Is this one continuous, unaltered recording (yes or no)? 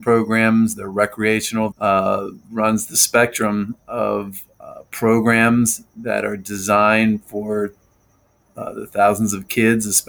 no